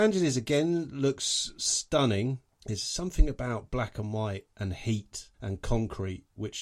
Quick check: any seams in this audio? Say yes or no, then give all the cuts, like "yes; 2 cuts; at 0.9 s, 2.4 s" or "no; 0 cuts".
yes; 1 cut; at 5.3 s